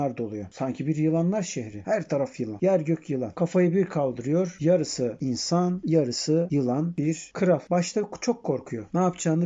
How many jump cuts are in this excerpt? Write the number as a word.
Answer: zero